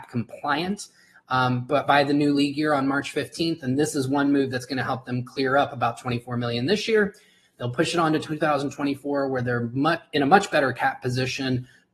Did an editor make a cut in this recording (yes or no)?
no